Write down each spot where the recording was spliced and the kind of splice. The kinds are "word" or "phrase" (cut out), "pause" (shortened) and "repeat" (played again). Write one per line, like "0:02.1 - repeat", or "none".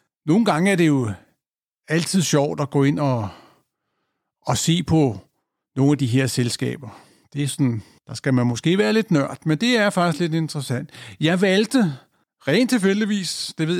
none

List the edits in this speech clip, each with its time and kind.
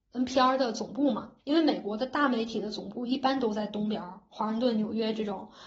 0:01.4 - pause

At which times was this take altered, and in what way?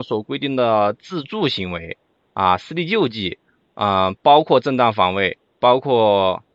none

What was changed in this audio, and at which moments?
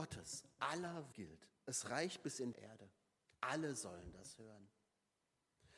0:01.1 - word
0:02.5 - phrase

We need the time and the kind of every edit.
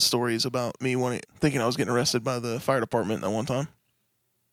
0:01.2 - pause

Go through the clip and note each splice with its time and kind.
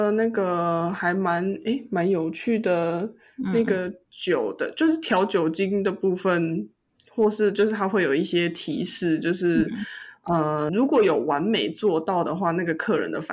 0:10.7 - word

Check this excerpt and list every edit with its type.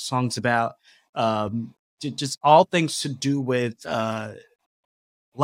none

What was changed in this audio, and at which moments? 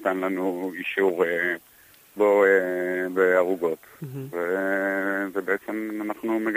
0:02.2 - word
0:03.1 - word

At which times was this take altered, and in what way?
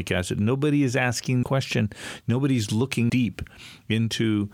0:01.4 - word
0:03.1 - word

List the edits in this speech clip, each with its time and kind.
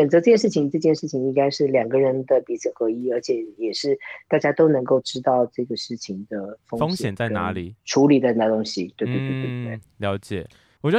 none

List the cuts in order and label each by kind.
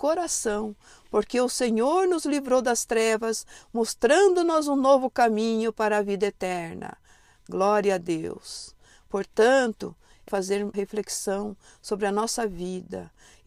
0:10.3 - word
0:10.7 - word

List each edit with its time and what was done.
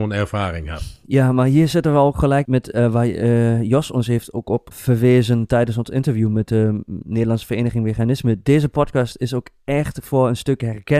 0:02.4 - word
0:04.7 - word

